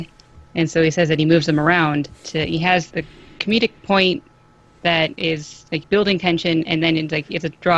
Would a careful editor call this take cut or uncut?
cut